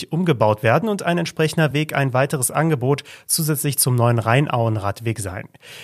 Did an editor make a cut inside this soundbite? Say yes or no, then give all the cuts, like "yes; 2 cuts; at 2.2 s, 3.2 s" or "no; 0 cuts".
no; 0 cuts